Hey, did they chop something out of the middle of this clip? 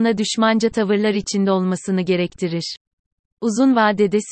no; 0 cuts

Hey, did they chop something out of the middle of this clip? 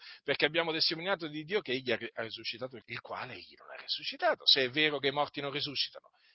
yes; 1 cut; at 2.8 s

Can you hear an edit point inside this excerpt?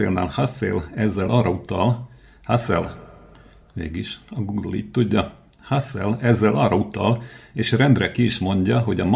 no; 0 cuts

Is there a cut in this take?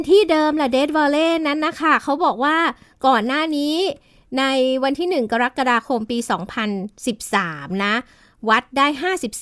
no; 0 cuts

